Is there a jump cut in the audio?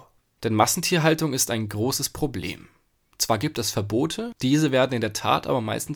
no; 0 cuts

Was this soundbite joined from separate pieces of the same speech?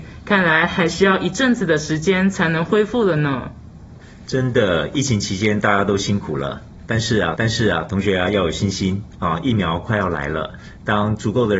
yes; 1 cut; at 7.4 s

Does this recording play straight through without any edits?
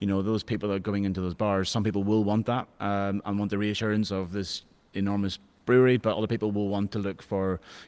yes; 0 cuts

